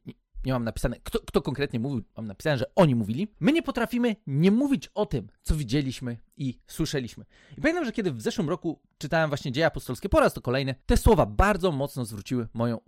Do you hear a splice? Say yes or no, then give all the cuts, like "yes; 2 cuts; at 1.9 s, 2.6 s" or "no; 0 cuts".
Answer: no; 0 cuts